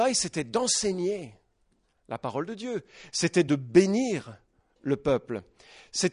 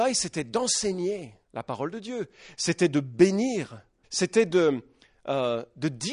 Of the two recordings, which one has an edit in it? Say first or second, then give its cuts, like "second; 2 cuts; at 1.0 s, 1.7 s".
second; 2 cuts; at 1.4 s, 4.0 s